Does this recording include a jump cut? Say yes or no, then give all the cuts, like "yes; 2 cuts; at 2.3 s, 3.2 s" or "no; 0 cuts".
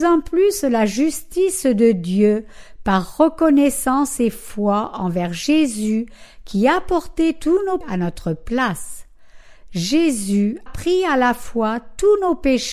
yes; 2 cuts; at 7.8 s, 10.7 s